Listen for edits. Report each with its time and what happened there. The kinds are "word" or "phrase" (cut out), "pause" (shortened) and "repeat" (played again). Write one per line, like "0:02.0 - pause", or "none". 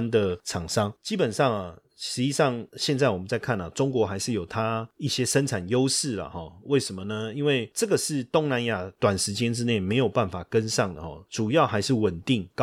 0:02.7 - pause